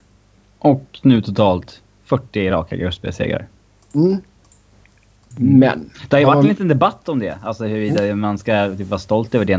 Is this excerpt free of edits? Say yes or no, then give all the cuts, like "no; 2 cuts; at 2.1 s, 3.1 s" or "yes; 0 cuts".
yes; 0 cuts